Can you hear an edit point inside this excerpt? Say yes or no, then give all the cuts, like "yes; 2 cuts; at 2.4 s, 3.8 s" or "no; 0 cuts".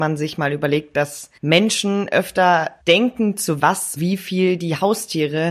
yes; 4 cuts; at 1.4 s, 2.8 s, 3.6 s, 4.0 s